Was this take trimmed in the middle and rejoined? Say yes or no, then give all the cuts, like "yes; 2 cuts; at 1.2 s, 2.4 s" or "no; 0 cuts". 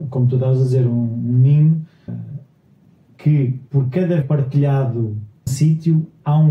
yes; 4 cuts; at 2.1 s, 3.7 s, 4.2 s, 5.5 s